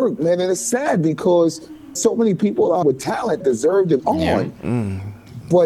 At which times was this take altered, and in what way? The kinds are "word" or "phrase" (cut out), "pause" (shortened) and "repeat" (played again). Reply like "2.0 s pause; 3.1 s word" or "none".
2.0 s word; 2.8 s word; 3.4 s word; 4.0 s word